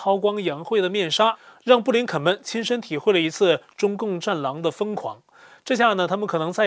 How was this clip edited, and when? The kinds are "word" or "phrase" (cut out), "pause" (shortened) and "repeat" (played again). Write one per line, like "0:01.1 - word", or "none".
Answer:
none